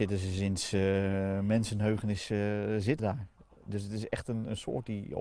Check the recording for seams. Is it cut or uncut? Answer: cut